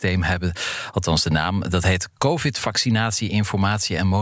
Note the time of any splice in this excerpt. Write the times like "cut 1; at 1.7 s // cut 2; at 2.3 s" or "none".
none